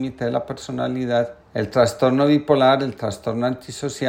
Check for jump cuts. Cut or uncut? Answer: cut